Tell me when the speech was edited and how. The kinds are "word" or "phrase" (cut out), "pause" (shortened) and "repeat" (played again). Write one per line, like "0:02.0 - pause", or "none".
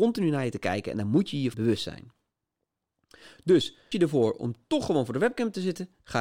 0:01.5 - word
0:03.9 - word